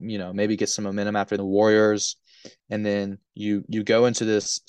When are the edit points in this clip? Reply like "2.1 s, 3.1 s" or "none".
1.4 s, 3.3 s